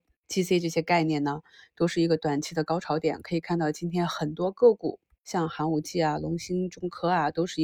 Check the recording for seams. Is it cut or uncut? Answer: uncut